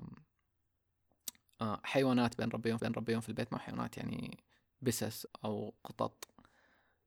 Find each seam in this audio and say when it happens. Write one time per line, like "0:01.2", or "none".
0:02.8
0:05.3
0:05.8